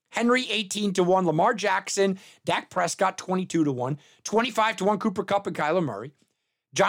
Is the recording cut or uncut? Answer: uncut